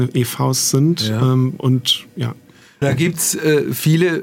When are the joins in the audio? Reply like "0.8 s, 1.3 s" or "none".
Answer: 2.8 s